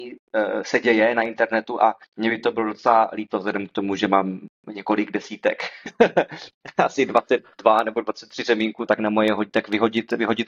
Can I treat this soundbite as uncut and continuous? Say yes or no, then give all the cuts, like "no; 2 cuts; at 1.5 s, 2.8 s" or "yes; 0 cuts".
no; 3 cuts; at 2.0 s, 4.6 s, 8.9 s